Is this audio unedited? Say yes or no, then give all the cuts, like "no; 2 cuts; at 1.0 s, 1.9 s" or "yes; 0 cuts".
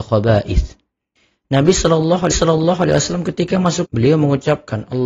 no; 2 cuts; at 2.3 s, 3.8 s